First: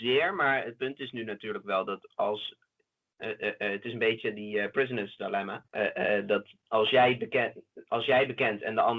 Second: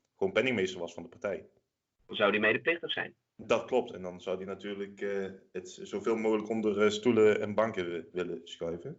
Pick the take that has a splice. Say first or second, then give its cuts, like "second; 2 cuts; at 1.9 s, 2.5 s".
first; 1 cut; at 5.7 s